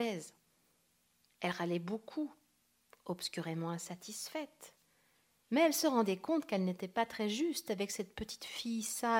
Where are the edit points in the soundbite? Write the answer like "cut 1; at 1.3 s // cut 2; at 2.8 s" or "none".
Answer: none